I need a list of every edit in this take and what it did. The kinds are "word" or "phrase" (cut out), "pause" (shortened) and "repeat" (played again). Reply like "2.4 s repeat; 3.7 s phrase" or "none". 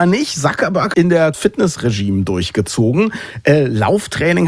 0.9 s word; 1.3 s phrase